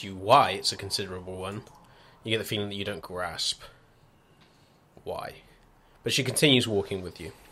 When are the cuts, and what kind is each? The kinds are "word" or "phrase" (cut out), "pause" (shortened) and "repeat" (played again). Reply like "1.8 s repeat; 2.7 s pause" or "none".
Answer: 3.0 s word